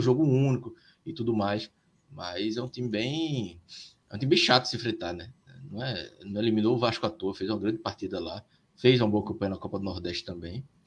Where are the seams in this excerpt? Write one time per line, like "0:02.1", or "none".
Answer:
none